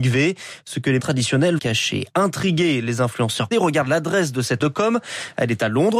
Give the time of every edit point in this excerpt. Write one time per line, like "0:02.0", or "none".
0:01.0
0:01.6
0:03.5
0:04.6